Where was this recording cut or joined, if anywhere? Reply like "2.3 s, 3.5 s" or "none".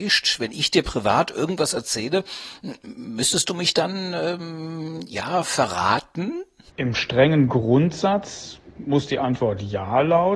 none